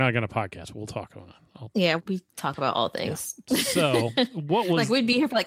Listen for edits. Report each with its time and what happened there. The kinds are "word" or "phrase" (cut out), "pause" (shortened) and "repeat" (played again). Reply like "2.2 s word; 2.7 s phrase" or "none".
2.0 s word